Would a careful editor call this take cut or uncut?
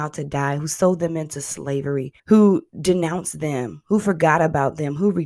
cut